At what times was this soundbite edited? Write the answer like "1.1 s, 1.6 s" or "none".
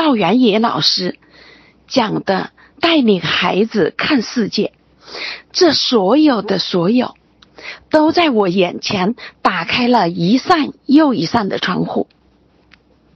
none